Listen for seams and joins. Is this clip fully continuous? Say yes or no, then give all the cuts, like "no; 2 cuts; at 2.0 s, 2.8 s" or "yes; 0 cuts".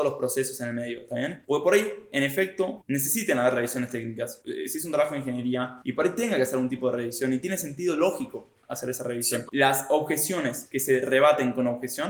yes; 0 cuts